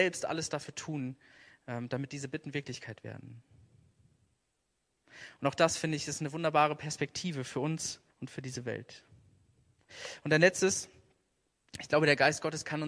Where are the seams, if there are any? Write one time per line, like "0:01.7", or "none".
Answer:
0:08.1